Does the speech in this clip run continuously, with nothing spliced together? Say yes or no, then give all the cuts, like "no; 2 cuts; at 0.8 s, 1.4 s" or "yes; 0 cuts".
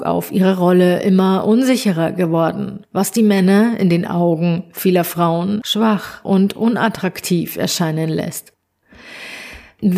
yes; 0 cuts